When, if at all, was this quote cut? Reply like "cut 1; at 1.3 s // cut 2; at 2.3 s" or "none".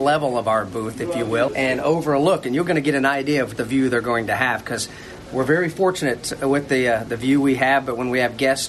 cut 1; at 1.5 s // cut 2; at 3.6 s